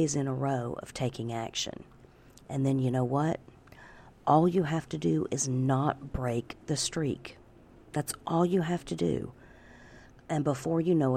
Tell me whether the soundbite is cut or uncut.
uncut